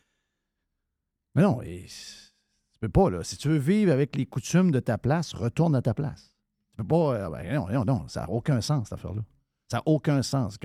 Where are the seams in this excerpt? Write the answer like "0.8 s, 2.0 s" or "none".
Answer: none